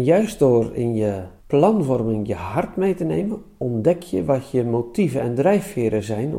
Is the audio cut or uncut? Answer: cut